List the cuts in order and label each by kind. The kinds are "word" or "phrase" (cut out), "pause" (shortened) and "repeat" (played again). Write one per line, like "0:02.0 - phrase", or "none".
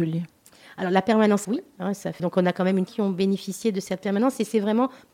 0:01.4 - word
0:02.2 - word
0:02.9 - phrase